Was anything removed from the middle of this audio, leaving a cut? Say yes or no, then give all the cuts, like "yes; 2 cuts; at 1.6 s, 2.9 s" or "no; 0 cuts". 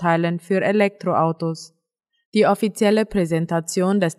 no; 0 cuts